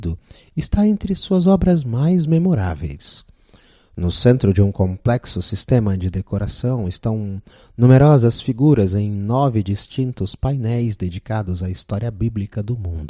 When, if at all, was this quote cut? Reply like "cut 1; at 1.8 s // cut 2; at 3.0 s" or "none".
none

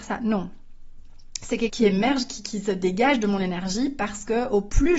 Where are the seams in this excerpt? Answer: cut 1; at 1.7 s

